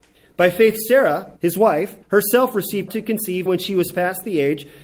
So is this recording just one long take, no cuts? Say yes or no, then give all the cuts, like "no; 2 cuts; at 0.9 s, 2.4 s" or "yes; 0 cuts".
no; 4 cuts; at 1.4 s, 2.0 s, 2.9 s, 3.5 s